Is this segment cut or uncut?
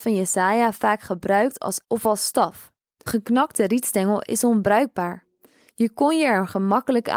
cut